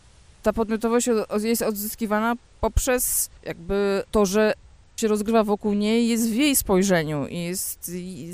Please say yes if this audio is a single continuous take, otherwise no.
no